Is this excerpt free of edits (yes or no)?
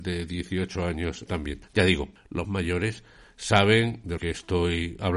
no